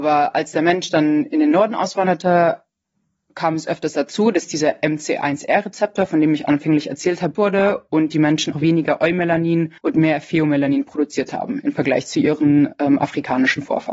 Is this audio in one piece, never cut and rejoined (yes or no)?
no